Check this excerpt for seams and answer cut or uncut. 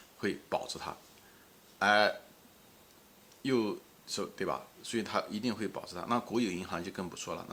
uncut